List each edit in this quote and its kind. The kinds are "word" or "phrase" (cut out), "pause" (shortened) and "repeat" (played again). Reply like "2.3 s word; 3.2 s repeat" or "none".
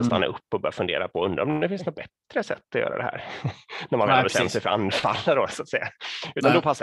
none